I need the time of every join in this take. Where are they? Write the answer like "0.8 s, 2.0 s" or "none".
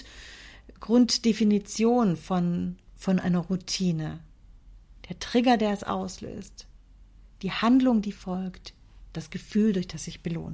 none